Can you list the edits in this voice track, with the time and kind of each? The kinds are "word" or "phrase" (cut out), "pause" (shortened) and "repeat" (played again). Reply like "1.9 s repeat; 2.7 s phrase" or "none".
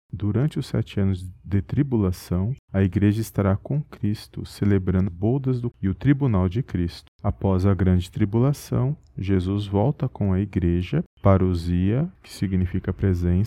5.1 s word; 5.7 s word

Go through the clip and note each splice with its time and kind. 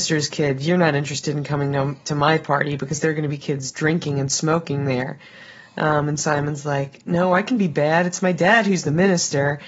none

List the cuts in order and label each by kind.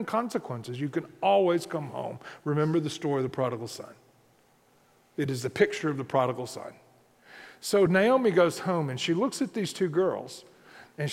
none

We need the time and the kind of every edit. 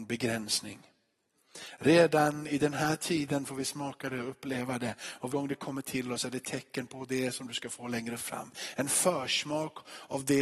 5.3 s word

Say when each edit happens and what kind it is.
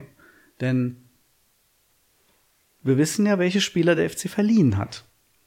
none

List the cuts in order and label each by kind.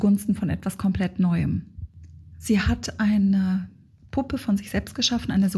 none

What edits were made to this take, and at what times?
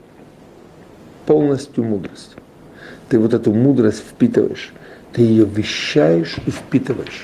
5.0 s pause

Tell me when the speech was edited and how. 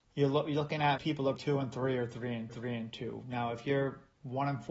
1.0 s word; 1.4 s word; 2.5 s repeat

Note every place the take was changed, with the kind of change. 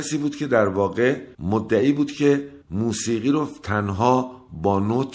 1.3 s pause; 2.6 s pause

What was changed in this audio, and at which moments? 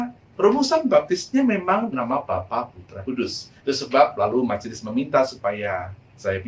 1.9 s word; 3.0 s phrase; 3.6 s pause

